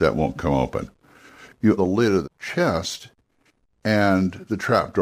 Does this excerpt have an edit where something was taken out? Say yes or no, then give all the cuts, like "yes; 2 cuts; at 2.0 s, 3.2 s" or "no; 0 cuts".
yes; 2 cuts; at 1.8 s, 2.2 s